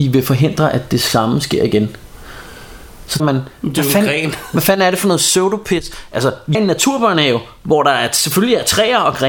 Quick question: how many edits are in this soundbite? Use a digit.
2